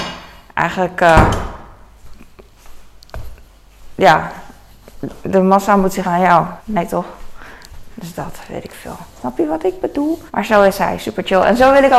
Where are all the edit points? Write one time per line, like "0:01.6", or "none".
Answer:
0:06.0
0:06.6
0:09.1
0:10.3